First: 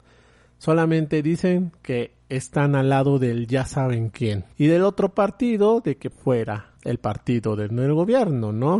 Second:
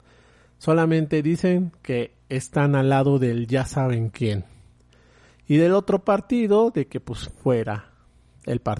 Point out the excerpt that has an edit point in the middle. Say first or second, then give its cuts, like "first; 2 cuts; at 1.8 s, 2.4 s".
first; 3 cuts; at 4.5 s, 6.1 s, 6.8 s